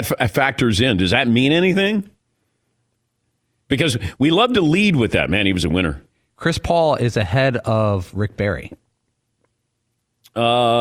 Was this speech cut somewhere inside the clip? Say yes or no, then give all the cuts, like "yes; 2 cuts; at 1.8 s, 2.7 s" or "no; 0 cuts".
no; 0 cuts